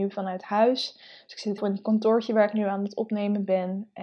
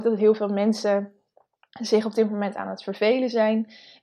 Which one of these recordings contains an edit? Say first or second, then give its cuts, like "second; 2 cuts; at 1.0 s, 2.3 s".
first; 1 cut; at 1.6 s